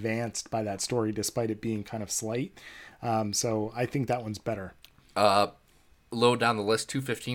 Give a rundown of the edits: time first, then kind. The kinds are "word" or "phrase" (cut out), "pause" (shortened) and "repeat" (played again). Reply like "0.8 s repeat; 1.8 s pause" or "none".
none